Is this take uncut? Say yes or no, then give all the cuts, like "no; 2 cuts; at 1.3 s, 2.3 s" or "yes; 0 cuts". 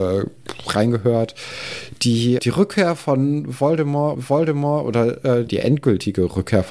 no; 3 cuts; at 2.4 s, 4.1 s, 5.5 s